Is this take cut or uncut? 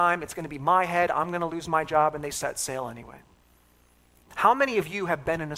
uncut